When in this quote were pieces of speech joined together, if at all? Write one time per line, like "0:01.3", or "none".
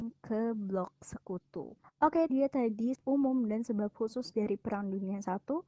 0:01.8
0:02.3
0:02.9